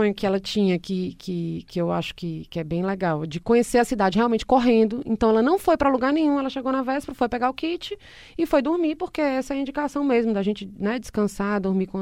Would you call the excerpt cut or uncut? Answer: uncut